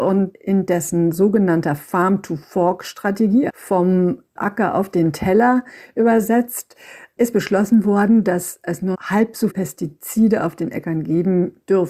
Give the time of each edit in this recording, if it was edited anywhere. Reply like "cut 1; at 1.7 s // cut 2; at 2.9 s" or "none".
cut 1; at 3.5 s // cut 2; at 8.9 s // cut 3; at 9.5 s